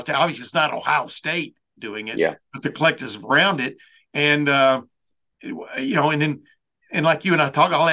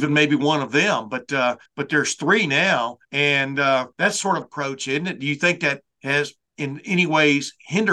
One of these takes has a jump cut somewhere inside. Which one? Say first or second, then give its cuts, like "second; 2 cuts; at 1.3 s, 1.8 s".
second; 5 cuts; at 1.7 s, 3.0 s, 3.9 s, 4.4 s, 5.9 s